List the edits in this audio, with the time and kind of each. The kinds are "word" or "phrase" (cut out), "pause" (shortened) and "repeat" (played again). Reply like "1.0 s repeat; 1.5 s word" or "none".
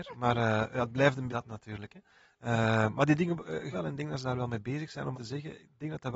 1.3 s word; 3.7 s word; 5.1 s word